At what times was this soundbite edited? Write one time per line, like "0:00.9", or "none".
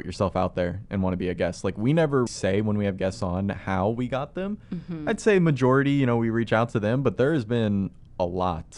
0:02.3